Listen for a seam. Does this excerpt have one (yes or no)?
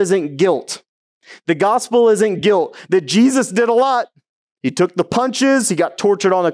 no